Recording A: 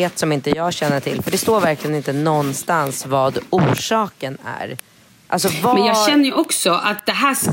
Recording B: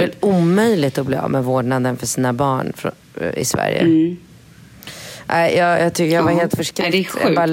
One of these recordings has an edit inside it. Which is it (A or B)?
A